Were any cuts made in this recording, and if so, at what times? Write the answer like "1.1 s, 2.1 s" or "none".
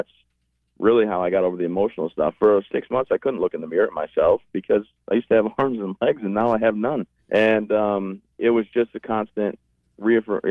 7.2 s, 8.3 s